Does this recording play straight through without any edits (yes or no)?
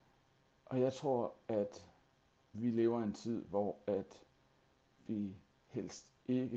yes